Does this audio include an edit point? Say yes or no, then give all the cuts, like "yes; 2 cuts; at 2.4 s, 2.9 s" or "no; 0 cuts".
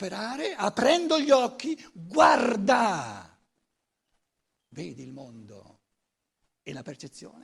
no; 0 cuts